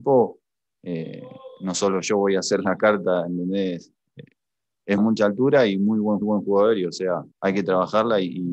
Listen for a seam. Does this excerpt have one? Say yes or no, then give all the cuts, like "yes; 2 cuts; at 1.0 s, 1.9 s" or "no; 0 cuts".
yes; 3 cuts; at 5.0 s, 6.2 s, 7.3 s